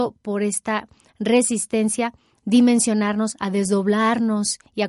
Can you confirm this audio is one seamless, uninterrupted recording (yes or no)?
no